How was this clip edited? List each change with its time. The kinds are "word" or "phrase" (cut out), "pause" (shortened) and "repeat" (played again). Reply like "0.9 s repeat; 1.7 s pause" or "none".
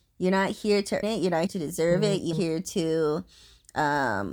1.0 s word; 1.5 s word; 2.3 s word